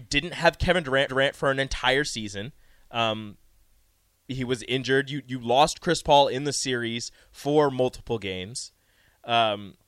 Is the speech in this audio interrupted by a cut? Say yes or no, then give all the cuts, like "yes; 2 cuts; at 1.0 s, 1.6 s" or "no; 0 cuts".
yes; 1 cut; at 1.1 s